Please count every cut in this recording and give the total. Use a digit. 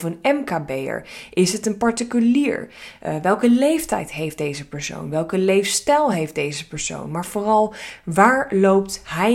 0